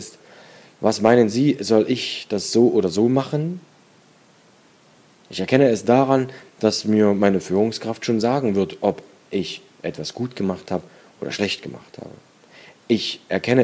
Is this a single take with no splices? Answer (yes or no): yes